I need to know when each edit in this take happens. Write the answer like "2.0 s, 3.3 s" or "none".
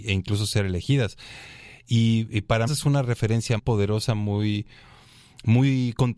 2.7 s, 3.6 s